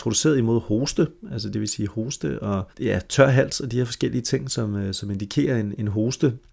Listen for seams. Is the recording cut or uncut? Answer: cut